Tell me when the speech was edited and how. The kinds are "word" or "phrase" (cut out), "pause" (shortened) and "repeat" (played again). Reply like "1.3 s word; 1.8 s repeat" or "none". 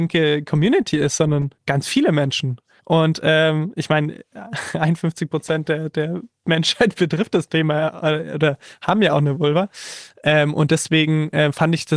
1.6 s pause; 2.8 s pause